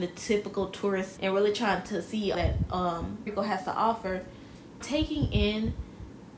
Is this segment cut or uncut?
cut